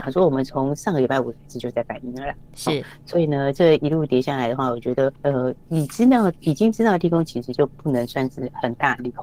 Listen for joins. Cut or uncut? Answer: cut